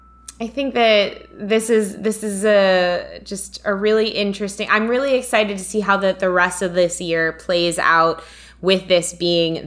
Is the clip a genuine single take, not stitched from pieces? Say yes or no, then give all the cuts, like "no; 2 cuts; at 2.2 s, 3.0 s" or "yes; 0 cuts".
yes; 0 cuts